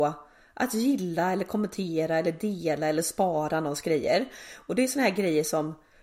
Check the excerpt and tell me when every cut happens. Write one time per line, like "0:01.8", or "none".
none